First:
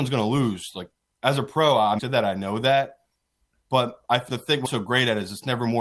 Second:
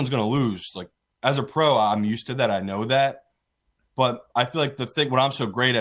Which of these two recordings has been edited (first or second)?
first